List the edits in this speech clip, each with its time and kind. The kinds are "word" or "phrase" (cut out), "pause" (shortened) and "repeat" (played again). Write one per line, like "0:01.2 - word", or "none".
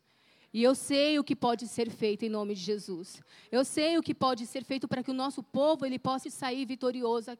0:06.2 - word